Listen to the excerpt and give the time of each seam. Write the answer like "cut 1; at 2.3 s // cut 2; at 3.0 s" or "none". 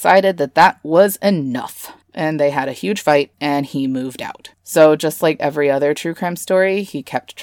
cut 1; at 2.0 s // cut 2; at 3.3 s // cut 3; at 4.5 s // cut 4; at 5.4 s